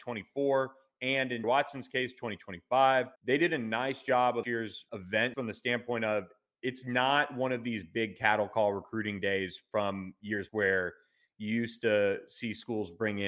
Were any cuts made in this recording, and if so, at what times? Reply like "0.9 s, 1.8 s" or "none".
1.4 s, 3.2 s, 4.4 s, 4.9 s, 5.3 s, 10.5 s